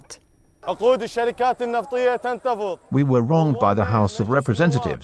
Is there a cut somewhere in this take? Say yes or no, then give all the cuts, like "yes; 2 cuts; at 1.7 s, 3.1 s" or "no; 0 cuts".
no; 0 cuts